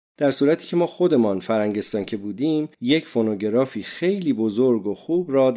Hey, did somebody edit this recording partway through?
yes; 1 cut; at 2.7 s

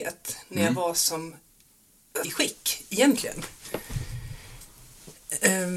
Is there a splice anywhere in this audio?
yes; 1 cut; at 2.2 s

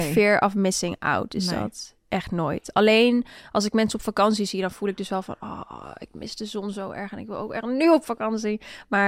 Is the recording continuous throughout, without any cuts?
yes; 0 cuts

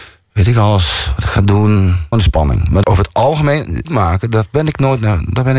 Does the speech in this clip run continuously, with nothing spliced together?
no; 3 cuts; at 2.1 s, 2.8 s, 3.8 s

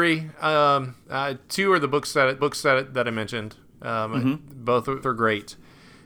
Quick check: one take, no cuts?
no; 3 cuts; at 1.0 s, 2.4 s, 5.0 s

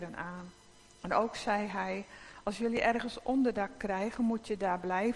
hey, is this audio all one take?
yes; 0 cuts

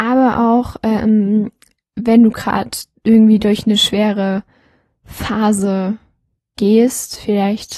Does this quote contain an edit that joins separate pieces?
no; 0 cuts

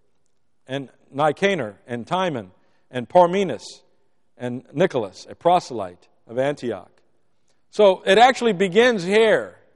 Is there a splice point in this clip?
no; 0 cuts

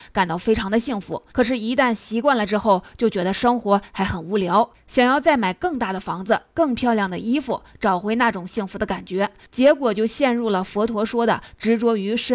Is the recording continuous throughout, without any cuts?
no; 1 cut; at 1.3 s

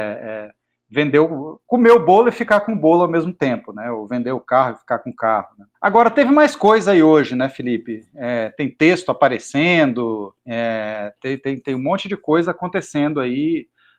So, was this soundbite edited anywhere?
yes; 2 cuts; at 5.7 s, 10.4 s

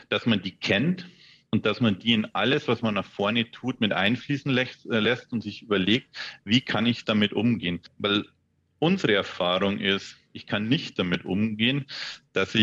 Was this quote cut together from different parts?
no; 0 cuts

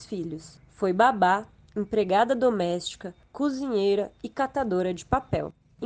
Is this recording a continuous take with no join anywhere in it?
yes; 0 cuts

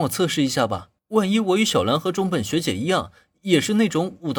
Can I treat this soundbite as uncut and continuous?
no; 1 cut; at 1.0 s

